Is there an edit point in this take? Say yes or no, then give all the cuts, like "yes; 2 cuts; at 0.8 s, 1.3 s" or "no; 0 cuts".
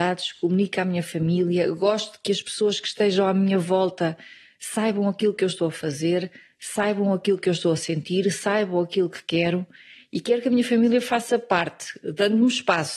no; 0 cuts